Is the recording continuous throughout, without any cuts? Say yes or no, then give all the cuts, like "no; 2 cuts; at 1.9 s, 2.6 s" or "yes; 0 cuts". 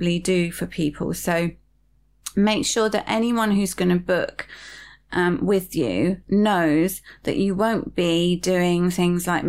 yes; 0 cuts